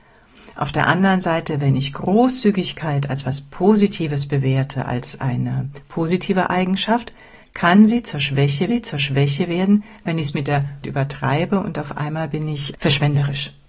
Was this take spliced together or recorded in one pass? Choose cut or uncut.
cut